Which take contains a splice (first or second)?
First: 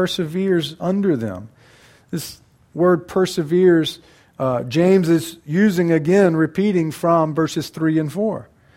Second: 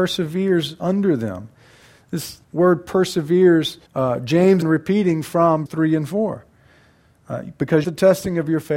second